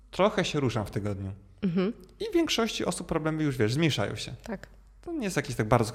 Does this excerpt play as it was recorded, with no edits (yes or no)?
yes